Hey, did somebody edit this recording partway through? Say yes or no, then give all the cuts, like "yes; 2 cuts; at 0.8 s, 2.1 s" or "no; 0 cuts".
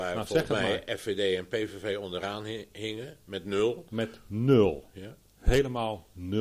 no; 0 cuts